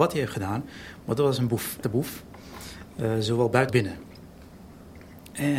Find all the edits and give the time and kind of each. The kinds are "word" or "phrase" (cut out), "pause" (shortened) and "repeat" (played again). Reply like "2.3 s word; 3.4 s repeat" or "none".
1.8 s word; 3.7 s word